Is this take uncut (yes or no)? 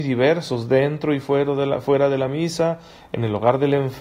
yes